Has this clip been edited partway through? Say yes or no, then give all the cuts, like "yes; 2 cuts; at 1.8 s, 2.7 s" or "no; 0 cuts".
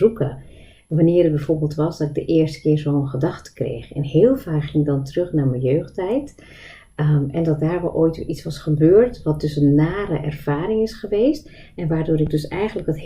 no; 0 cuts